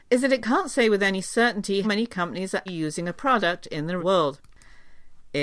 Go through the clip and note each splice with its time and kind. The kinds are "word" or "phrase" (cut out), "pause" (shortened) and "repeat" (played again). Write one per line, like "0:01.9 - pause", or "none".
0:01.8 - word
0:02.7 - word
0:03.1 - word
0:04.0 - word